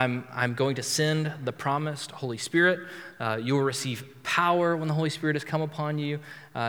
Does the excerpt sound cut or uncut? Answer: uncut